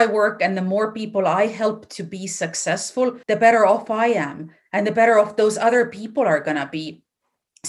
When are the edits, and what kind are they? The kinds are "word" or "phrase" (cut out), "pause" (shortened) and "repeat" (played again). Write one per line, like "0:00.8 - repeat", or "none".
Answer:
0:03.2 - pause